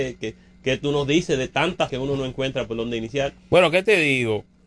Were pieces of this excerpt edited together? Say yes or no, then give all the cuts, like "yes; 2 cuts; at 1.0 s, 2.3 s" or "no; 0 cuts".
yes; 1 cut; at 1.9 s